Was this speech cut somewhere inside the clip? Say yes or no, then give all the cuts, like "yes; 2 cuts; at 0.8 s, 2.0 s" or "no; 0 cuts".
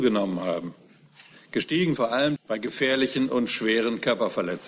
yes; 2 cuts; at 2.0 s, 2.4 s